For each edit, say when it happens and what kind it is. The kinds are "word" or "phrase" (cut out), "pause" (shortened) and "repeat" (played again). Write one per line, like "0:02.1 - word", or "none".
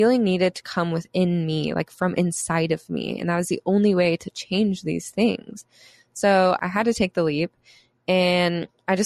none